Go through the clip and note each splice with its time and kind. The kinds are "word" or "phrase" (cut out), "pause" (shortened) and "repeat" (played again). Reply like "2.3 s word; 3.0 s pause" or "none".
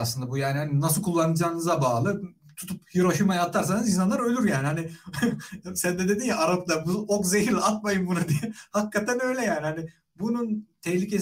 none